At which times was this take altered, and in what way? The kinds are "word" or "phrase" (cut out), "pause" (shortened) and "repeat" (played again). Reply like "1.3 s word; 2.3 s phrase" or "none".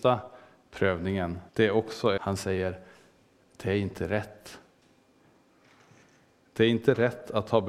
1.5 s pause; 2.2 s phrase